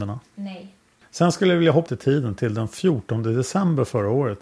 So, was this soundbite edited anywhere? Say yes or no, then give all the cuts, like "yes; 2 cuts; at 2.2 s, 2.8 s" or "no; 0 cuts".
yes; 2 cuts; at 1.0 s, 1.9 s